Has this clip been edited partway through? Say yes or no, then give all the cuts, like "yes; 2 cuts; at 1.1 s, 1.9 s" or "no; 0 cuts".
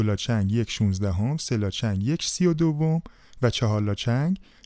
no; 0 cuts